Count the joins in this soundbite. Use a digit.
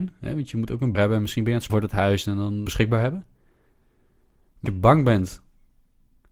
4